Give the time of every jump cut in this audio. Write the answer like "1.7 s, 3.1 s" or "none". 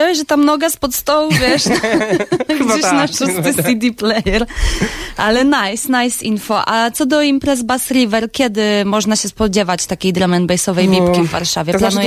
none